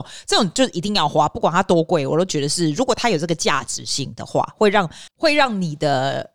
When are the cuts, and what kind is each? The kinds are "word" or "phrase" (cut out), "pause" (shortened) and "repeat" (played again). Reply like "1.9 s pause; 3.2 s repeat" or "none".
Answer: 5.1 s pause